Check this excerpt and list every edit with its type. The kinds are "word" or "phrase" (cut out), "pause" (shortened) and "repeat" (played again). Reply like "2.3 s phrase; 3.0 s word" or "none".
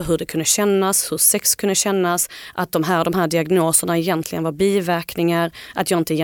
none